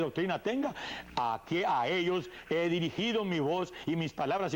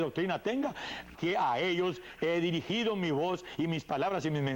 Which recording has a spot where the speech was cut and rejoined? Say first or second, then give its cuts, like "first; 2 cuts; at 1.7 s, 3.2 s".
second; 1 cut; at 1.1 s